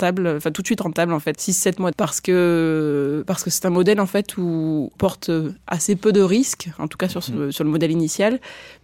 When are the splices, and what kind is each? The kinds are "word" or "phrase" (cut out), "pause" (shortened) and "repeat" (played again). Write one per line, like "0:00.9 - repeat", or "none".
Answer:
0:01.3 - phrase
0:01.9 - word
0:05.0 - word